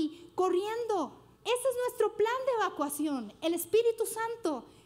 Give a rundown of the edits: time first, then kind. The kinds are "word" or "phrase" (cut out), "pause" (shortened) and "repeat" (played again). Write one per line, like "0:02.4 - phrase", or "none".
0:01.4 - pause